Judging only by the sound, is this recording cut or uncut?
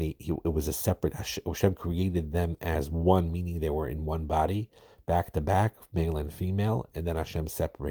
uncut